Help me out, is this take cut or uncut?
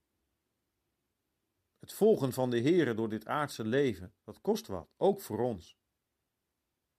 cut